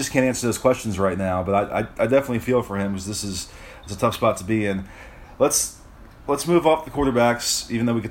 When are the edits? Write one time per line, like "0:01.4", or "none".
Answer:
none